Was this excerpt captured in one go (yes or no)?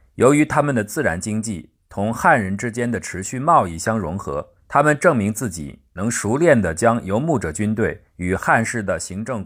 no